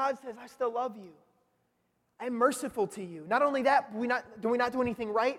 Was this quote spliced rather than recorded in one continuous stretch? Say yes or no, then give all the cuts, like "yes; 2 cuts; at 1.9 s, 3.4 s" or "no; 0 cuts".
no; 0 cuts